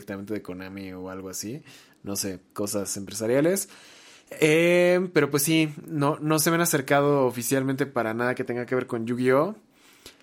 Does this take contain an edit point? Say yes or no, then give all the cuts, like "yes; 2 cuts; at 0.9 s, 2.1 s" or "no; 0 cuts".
no; 0 cuts